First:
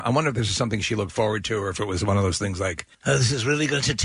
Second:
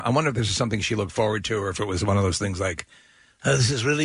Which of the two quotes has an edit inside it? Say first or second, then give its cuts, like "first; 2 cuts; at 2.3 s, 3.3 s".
first; 1 cut; at 2.9 s